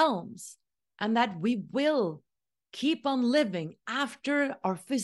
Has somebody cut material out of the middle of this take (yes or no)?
no